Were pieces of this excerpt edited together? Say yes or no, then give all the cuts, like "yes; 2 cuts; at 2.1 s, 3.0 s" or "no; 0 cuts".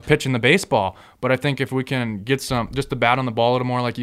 no; 0 cuts